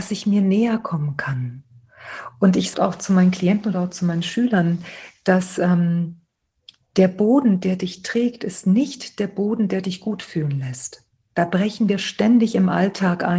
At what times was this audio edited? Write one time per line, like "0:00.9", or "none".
0:02.7